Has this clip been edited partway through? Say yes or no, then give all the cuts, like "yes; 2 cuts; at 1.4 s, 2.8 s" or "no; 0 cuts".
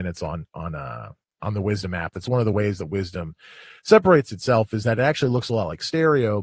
no; 0 cuts